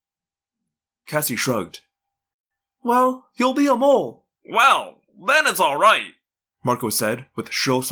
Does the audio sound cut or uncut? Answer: cut